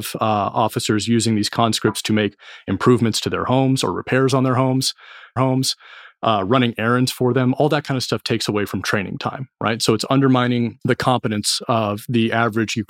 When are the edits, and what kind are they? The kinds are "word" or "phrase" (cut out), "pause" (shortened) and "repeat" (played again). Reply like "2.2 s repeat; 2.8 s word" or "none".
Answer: 5.4 s repeat